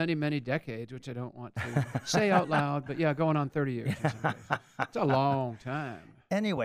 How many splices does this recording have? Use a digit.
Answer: 0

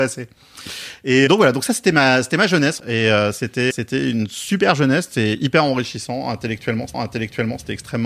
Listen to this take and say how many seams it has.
4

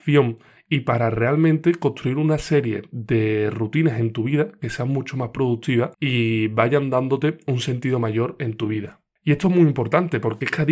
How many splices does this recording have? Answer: 1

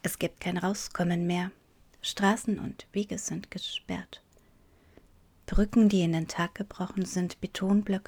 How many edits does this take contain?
0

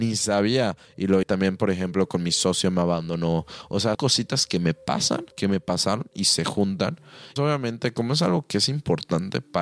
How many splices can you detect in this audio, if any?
4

